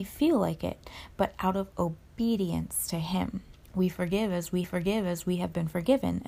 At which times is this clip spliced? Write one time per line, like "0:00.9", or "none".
0:03.6
0:04.6